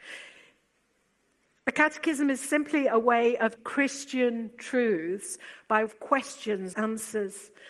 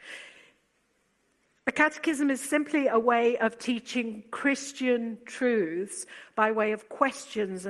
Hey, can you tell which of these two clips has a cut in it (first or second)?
first